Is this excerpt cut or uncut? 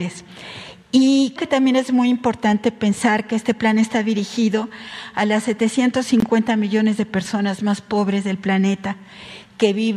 cut